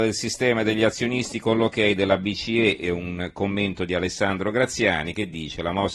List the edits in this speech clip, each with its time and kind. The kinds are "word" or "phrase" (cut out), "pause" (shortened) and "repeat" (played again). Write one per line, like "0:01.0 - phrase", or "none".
none